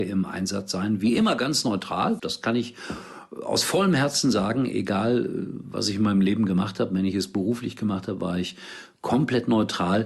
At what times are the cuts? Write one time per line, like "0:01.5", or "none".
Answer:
0:02.2